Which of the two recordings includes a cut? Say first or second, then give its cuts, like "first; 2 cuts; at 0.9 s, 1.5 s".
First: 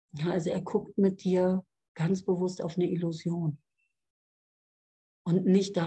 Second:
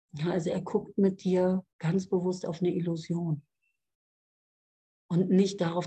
second; 1 cut; at 1.7 s